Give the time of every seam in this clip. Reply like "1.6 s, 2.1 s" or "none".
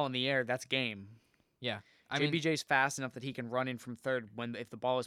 none